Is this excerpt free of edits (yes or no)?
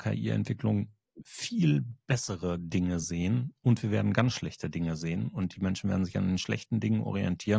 yes